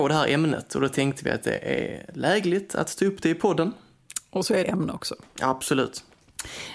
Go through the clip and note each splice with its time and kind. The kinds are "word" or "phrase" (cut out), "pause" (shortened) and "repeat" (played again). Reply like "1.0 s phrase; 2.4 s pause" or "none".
4.6 s phrase